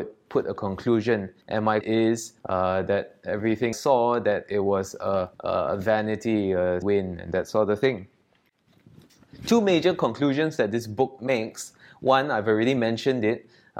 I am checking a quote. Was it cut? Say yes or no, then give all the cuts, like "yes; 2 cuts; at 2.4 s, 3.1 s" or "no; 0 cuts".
yes; 6 cuts; at 1.4 s, 1.8 s, 2.4 s, 3.7 s, 5.3 s, 6.8 s